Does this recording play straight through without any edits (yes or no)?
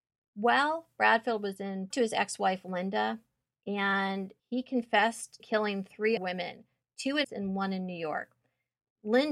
no